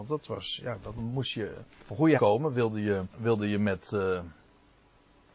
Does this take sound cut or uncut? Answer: cut